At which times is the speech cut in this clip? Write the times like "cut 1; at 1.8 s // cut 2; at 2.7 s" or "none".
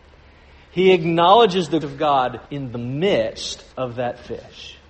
cut 1; at 1.8 s // cut 2; at 2.4 s // cut 3; at 3.7 s